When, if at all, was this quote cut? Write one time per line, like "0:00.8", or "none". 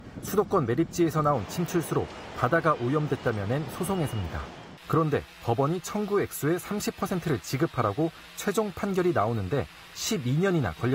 0:04.8